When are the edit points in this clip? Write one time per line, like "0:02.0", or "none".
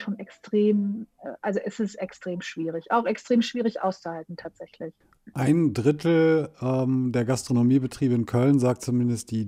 none